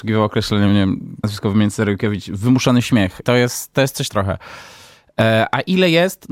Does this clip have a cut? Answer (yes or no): yes